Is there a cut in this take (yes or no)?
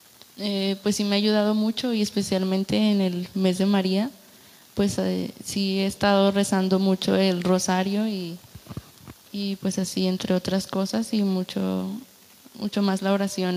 no